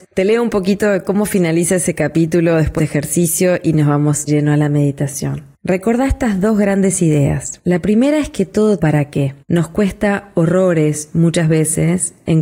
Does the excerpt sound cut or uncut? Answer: cut